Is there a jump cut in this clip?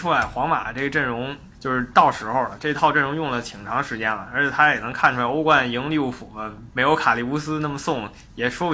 yes; 1 cut; at 1.5 s

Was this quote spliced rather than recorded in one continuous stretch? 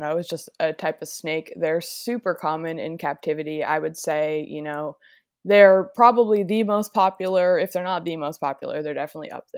no; 0 cuts

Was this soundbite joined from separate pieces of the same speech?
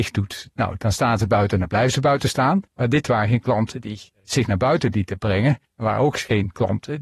yes; 3 cuts; at 2.7 s, 4.1 s, 5.6 s

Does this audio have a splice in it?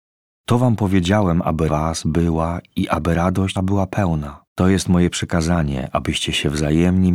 yes; 3 cuts; at 1.7 s, 3.6 s, 4.5 s

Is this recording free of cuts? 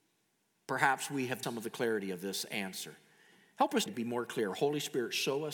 no; 2 cuts; at 1.4 s, 3.9 s

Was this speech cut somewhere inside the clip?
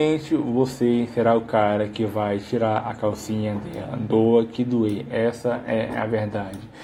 no; 0 cuts

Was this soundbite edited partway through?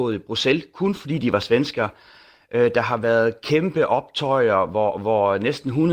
no; 0 cuts

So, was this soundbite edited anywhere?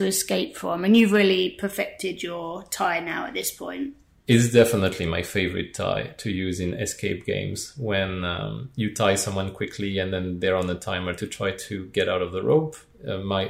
no; 0 cuts

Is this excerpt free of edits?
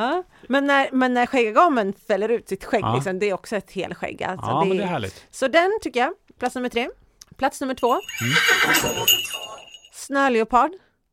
yes; 0 cuts

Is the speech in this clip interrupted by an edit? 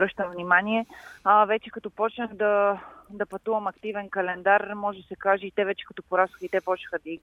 yes; 1 cut; at 1.2 s

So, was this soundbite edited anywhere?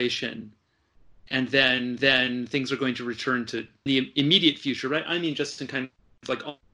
yes; 2 cuts; at 2.0 s, 3.9 s

